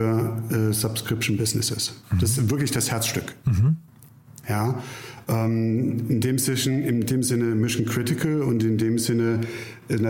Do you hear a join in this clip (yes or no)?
no